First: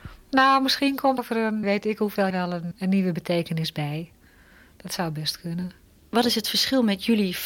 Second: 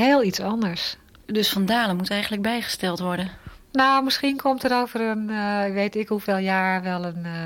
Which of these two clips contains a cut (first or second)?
first